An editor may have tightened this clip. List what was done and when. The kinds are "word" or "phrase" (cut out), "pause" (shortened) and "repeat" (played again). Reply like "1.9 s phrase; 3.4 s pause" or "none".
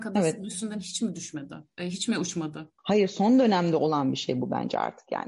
2.8 s pause